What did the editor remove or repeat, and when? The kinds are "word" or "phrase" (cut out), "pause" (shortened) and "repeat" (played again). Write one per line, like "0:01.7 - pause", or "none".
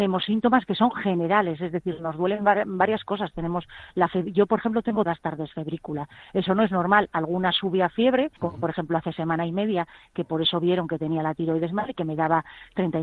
0:05.1 - word
0:08.4 - pause